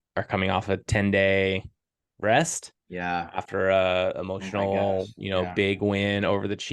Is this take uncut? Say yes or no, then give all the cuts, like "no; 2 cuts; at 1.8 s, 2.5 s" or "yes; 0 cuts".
yes; 0 cuts